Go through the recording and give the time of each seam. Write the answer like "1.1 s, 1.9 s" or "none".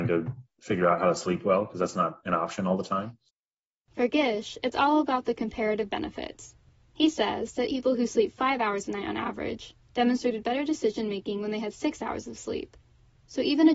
7.7 s